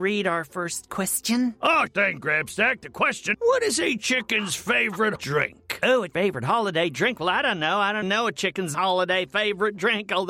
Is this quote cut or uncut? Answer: cut